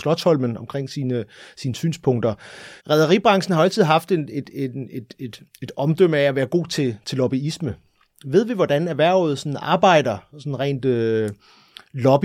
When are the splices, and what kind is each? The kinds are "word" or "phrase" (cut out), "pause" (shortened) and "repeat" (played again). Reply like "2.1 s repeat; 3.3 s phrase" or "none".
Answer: 2.8 s pause